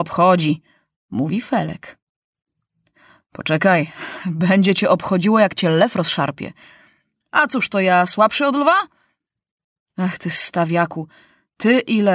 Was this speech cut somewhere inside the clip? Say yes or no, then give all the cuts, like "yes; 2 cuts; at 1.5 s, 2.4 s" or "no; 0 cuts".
no; 0 cuts